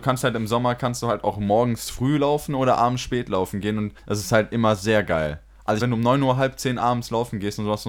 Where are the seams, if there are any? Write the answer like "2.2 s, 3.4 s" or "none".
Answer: 4.0 s, 5.8 s